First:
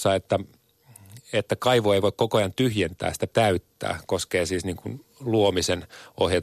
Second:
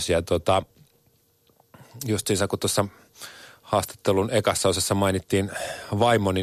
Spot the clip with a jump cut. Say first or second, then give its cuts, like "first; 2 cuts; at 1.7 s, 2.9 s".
first; 1 cut; at 3.3 s